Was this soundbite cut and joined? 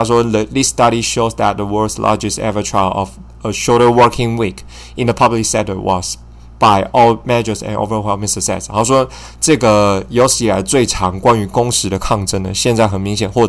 no; 0 cuts

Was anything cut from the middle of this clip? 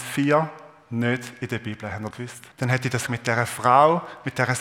yes; 3 cuts; at 2.1 s, 2.5 s, 3.1 s

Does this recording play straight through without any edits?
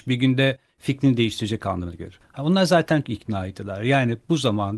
no; 1 cut; at 3.0 s

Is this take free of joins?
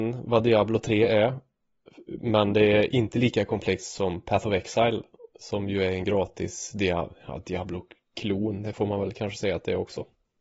yes; 0 cuts

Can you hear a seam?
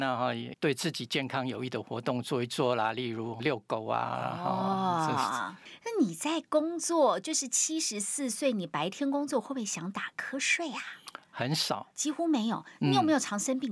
yes; 2 cuts; at 3.4 s, 11.9 s

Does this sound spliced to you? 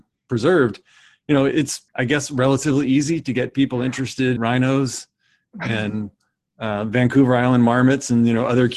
yes; 2 cuts; at 1.9 s, 4.4 s

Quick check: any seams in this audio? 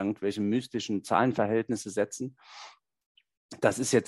no; 0 cuts

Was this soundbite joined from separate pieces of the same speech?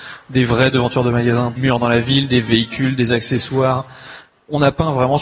yes; 1 cut; at 1.6 s

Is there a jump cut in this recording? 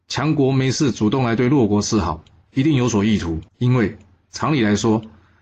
yes; 1 cut; at 3.5 s

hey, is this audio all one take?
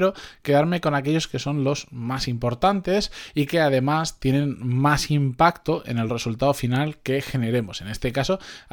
yes; 0 cuts

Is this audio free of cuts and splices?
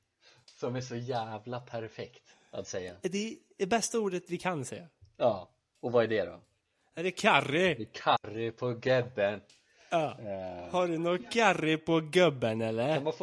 yes; 0 cuts

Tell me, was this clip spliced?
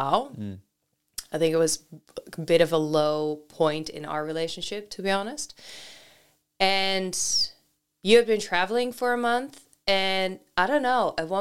no; 0 cuts

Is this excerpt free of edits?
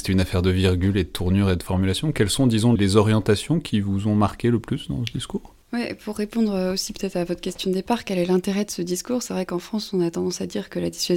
no; 2 cuts; at 2.8 s, 5.6 s

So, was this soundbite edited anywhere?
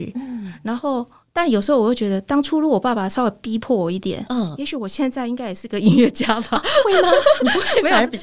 no; 0 cuts

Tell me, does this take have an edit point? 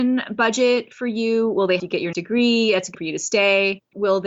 yes; 3 cuts; at 1.8 s, 2.1 s, 2.9 s

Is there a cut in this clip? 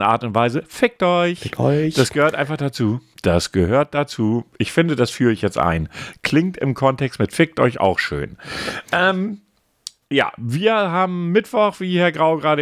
no; 0 cuts

